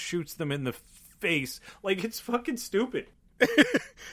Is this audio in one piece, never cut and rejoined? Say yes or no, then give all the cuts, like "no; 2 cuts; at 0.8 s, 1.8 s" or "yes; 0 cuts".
yes; 0 cuts